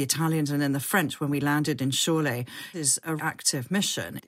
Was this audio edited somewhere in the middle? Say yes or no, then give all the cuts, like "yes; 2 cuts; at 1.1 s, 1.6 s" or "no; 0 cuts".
yes; 2 cuts; at 2.7 s, 3.2 s